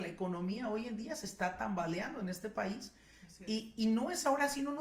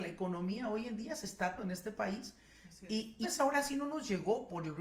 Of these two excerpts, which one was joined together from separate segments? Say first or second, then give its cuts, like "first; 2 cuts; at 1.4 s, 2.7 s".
second; 2 cuts; at 1.6 s, 3.2 s